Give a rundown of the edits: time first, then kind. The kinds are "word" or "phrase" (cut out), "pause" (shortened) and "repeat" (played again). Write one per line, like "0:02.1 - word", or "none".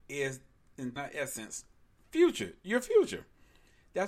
0:01.0 - phrase